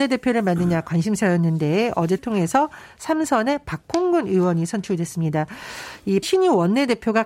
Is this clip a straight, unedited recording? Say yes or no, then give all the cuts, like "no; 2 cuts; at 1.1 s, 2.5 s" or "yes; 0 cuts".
no; 2 cuts; at 2.2 s, 6.2 s